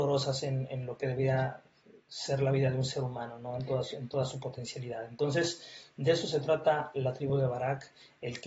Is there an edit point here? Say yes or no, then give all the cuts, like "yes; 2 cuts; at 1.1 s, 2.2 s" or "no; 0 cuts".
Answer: no; 0 cuts